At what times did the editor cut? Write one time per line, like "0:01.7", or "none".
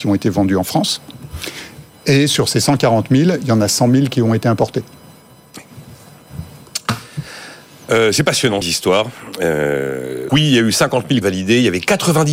0:08.6
0:10.3
0:11.2